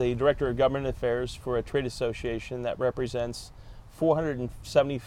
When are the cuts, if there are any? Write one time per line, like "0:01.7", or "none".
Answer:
none